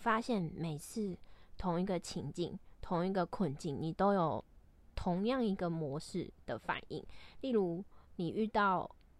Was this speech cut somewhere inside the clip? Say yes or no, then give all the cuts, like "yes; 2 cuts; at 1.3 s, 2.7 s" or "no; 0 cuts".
no; 0 cuts